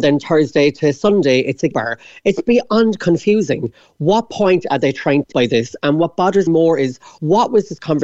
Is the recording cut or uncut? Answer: cut